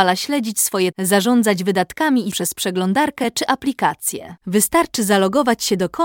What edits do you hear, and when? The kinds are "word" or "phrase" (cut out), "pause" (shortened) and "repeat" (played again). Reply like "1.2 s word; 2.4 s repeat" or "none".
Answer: 0.9 s word; 2.3 s word; 4.4 s pause